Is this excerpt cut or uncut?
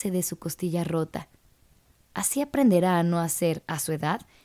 uncut